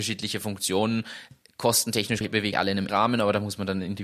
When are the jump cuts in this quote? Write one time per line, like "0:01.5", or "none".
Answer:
0:02.2
0:02.5
0:02.9